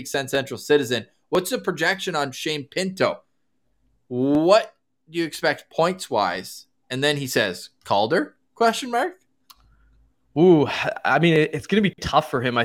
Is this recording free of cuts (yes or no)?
yes